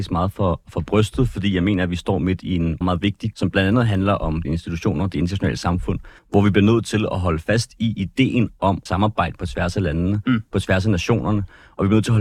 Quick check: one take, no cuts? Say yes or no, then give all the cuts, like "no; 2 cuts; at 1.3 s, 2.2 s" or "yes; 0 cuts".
no; 5 cuts; at 2.8 s, 3.3 s, 4.4 s, 6.2 s, 8.9 s